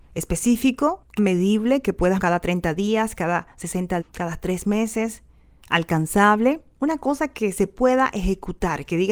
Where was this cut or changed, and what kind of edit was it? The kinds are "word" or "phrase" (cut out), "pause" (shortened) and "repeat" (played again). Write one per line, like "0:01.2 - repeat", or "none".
0:01.2 - word
0:02.2 - word
0:04.0 - word